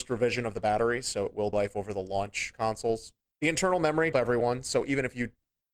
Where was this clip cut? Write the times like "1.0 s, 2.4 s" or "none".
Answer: 1.5 s, 2.5 s, 3.3 s, 4.1 s